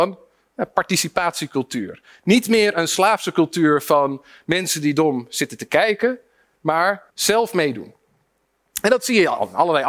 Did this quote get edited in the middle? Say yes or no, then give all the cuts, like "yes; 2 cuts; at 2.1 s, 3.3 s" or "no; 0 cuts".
yes; 1 cut; at 7.1 s